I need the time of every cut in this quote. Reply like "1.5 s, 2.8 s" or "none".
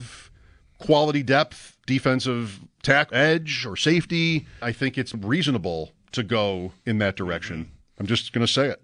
1.9 s, 3.1 s, 4.6 s, 5.1 s